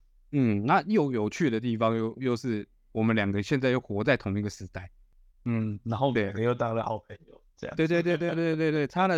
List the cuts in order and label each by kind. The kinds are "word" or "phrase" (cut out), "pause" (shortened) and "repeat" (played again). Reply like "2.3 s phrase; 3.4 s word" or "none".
none